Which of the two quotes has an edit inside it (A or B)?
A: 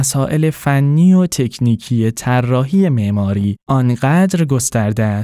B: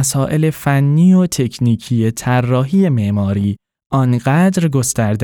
A